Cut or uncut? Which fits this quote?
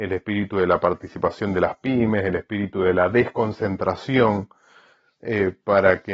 uncut